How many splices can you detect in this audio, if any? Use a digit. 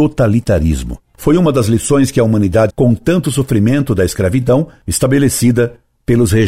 1